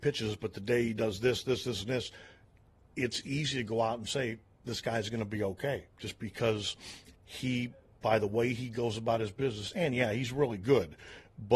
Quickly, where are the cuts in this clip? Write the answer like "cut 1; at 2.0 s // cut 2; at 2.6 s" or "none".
none